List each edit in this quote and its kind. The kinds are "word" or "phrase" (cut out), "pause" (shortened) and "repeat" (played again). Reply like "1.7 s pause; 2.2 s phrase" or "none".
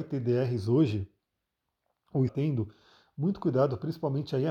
2.3 s word